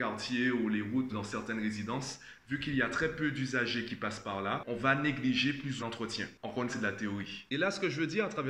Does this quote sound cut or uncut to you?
cut